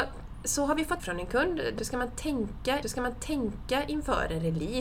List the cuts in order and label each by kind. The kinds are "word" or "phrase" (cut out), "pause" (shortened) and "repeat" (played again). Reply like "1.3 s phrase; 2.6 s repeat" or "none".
1.0 s phrase; 1.8 s phrase; 2.8 s repeat